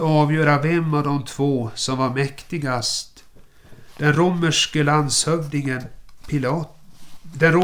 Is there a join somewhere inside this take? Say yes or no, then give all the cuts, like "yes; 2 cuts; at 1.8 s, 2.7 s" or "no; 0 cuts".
no; 0 cuts